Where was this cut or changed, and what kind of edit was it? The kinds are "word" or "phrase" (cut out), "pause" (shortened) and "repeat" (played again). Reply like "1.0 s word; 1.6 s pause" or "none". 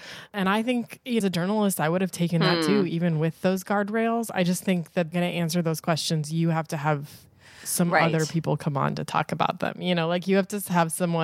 1.2 s phrase; 5.1 s phrase